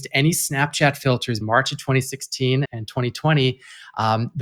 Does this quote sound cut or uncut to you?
cut